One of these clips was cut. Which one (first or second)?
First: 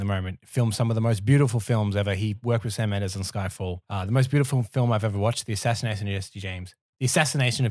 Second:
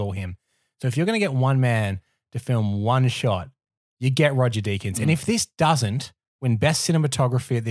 first